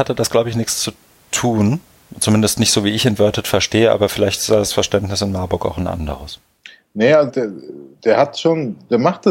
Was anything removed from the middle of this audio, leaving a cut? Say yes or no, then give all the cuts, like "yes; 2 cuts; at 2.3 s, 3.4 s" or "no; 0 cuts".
yes; 1 cut; at 7.3 s